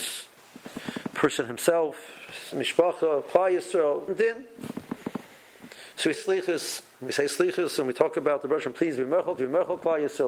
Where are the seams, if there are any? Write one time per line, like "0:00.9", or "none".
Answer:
0:04.1
0:06.1
0:06.9
0:09.4